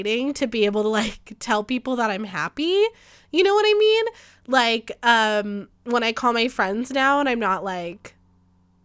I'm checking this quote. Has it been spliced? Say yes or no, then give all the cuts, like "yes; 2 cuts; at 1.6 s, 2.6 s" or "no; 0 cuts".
yes; 1 cut; at 5.8 s